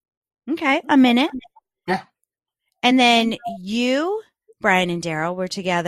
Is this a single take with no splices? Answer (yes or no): yes